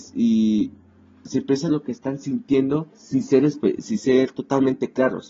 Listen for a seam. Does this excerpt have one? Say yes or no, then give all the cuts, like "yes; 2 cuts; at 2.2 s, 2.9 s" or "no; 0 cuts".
yes; 2 cuts; at 1.7 s, 2.9 s